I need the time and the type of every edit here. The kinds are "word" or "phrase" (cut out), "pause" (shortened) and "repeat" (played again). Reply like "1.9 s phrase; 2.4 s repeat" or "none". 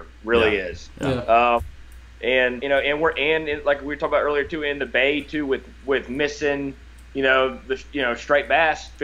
2.6 s word